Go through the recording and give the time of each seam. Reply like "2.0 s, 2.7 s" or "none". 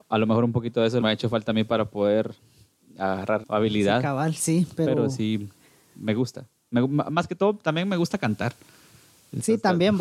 1.0 s, 3.4 s